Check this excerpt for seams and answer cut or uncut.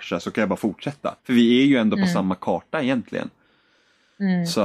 cut